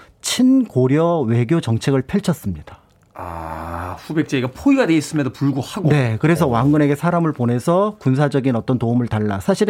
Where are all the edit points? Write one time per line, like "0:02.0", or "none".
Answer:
none